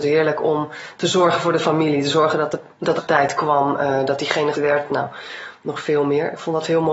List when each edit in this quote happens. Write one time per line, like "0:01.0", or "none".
0:03.0
0:04.5

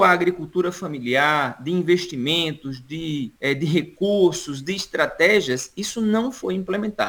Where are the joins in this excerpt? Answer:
0:03.4

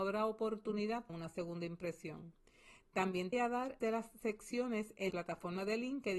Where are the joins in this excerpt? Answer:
0:01.1
0:03.3
0:03.8
0:05.1

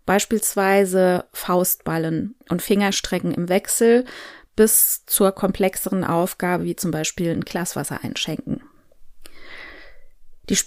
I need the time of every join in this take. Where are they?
0:02.4

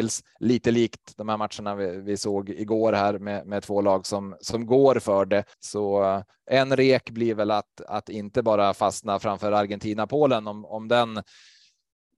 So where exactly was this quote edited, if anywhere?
0:05.5

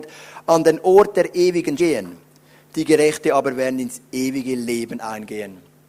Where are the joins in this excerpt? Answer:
0:01.8

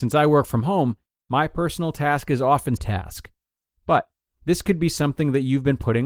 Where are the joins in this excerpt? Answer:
0:02.8

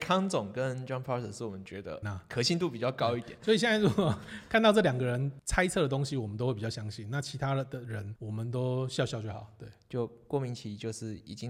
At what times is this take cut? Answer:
0:02.0

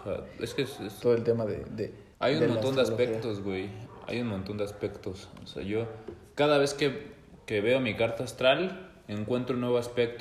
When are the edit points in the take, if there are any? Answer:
0:02.1

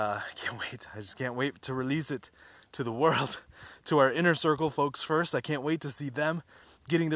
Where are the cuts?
none

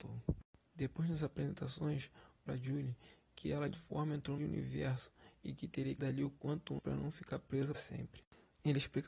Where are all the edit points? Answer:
0:02.5
0:03.7
0:04.4
0:06.0
0:06.8
0:07.7

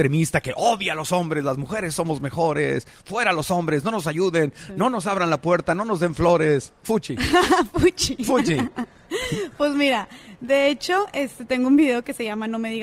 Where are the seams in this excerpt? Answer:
none

